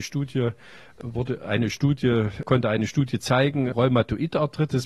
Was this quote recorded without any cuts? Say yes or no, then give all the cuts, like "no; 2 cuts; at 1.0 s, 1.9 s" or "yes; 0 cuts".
no; 1 cut; at 3.7 s